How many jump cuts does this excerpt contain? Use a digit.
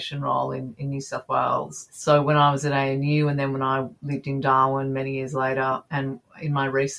0